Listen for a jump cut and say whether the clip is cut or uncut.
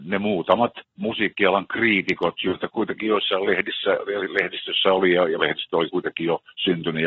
cut